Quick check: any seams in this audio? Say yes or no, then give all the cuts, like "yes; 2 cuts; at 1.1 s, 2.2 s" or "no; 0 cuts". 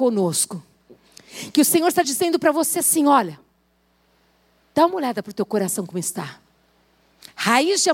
no; 0 cuts